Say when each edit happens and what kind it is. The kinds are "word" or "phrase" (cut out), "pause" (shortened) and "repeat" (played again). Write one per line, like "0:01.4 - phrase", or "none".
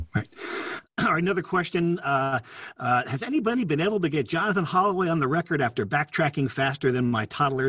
none

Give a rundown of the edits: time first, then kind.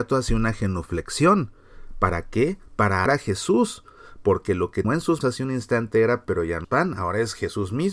0:03.1 - word
0:04.8 - word
0:05.2 - word
0:06.3 - word
0:06.6 - word

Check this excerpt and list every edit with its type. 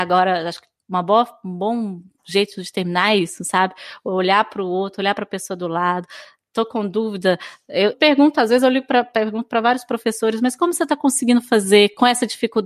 0:07.9 - word

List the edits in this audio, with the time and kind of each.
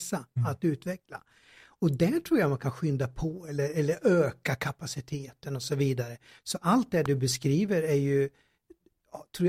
none

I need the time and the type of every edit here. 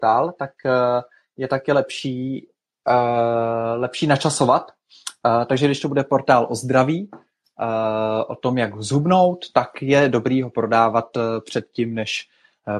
none

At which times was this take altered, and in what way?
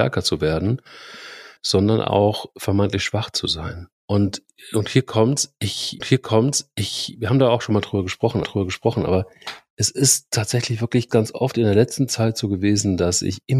0:01.6 - pause
0:04.0 - pause
0:06.0 - repeat
0:08.4 - repeat
0:11.1 - word

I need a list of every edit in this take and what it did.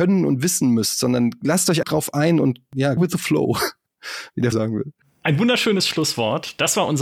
0:01.8 - word
0:03.0 - word
0:04.5 - word

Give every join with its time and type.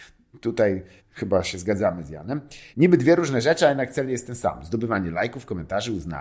0:01.0 - pause
0:02.7 - pause

